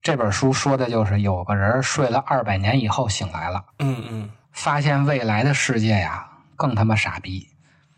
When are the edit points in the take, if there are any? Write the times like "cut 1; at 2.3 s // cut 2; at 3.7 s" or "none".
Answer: cut 1; at 3.7 s // cut 2; at 4.4 s

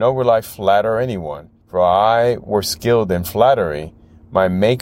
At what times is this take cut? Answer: cut 1; at 1.6 s

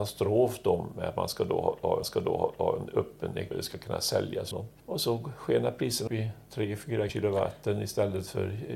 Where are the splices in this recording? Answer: cut 1; at 2.0 s // cut 2; at 3.5 s // cut 3; at 4.5 s // cut 4; at 6.1 s // cut 5; at 7.1 s

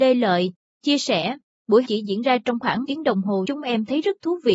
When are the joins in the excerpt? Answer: cut 1; at 1.8 s // cut 2; at 2.8 s // cut 3; at 3.4 s

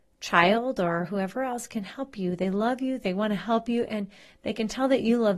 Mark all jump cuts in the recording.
none

